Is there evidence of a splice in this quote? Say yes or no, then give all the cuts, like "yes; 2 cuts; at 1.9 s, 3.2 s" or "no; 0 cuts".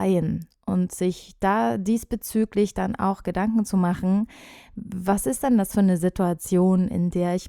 no; 0 cuts